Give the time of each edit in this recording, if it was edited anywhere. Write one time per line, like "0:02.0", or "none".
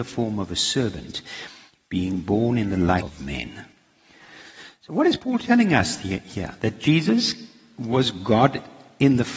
none